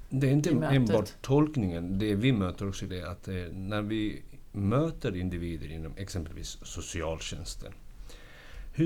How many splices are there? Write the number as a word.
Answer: one